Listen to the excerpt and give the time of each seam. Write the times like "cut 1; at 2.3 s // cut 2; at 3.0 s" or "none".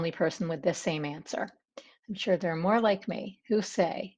none